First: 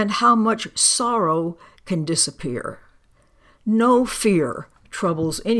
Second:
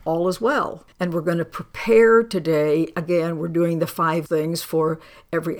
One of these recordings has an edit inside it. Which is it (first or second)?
second